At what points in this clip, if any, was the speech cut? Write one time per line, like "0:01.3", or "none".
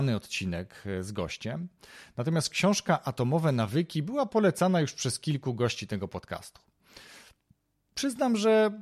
none